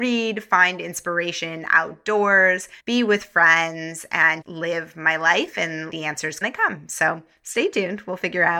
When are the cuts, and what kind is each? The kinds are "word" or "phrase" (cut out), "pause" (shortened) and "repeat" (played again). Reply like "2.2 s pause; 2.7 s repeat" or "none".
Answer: 2.8 s pause; 4.4 s word; 5.9 s word; 6.4 s phrase